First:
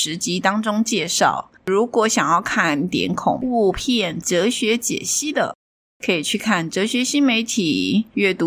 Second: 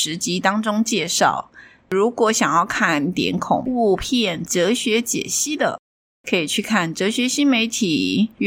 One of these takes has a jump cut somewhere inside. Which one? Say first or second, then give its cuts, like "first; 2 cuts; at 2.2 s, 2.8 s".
first; 1 cut; at 1.6 s